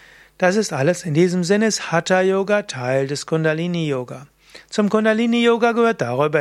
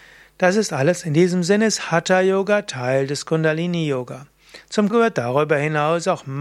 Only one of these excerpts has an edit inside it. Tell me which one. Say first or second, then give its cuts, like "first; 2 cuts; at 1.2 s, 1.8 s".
second; 1 cut; at 4.9 s